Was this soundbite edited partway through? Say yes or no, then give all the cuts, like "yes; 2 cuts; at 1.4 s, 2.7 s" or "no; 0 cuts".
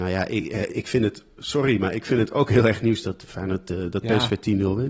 no; 0 cuts